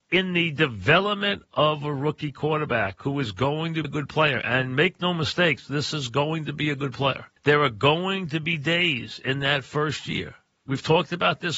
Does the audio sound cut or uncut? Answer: cut